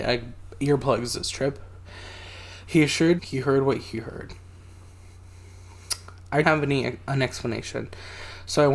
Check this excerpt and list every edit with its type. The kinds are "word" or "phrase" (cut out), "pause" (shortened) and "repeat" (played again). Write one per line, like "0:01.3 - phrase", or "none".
0:03.2 - word
0:06.4 - word